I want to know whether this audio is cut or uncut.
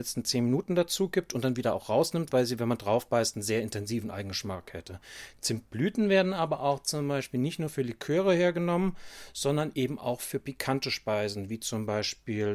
uncut